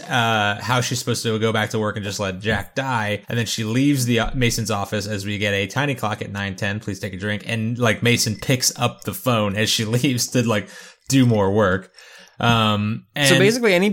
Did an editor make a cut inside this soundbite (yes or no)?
yes